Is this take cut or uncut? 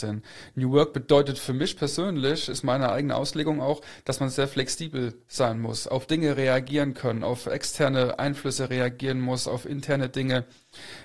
uncut